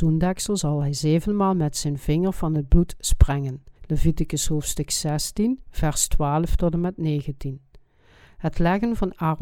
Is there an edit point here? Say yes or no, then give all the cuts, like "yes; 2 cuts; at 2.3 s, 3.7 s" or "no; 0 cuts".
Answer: yes; 1 cut; at 3.8 s